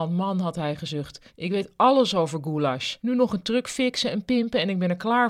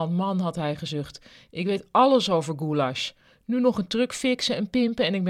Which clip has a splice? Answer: first; 2 cuts; at 1.3 s, 3.0 s

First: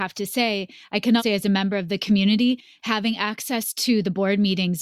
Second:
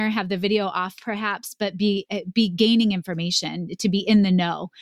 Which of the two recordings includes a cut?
first; 1 cut; at 1.2 s

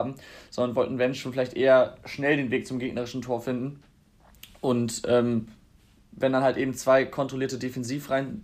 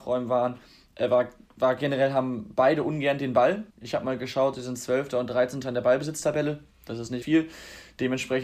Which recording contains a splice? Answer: second; 2 cuts; at 3.7 s, 7.2 s

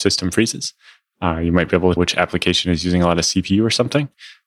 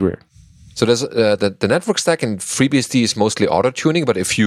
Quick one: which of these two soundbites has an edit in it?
first; 1 cut; at 2.0 s

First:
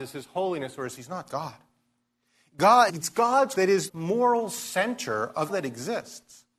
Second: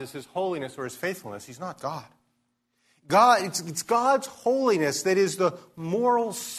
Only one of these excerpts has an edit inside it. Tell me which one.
first; 5 cuts; at 1.0 s, 2.9 s, 3.5 s, 3.9 s, 5.5 s

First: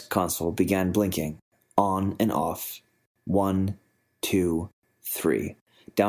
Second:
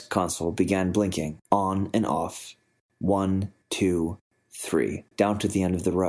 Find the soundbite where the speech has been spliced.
second; 3 cuts; at 1.4 s, 3.6 s, 5.1 s

